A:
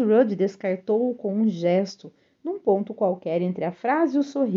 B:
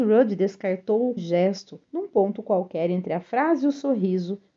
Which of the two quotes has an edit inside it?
B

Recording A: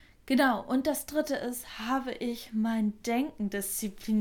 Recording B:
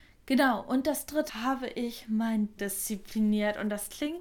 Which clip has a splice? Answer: B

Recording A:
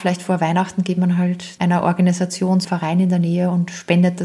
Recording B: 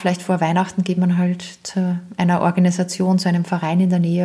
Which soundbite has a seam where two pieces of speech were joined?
A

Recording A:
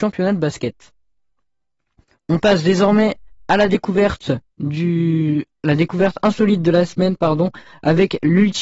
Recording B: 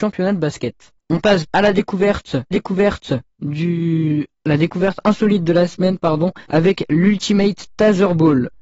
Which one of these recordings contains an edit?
B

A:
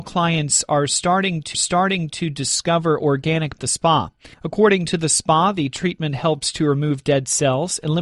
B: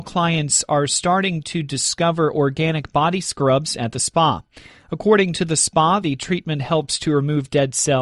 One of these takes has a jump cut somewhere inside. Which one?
A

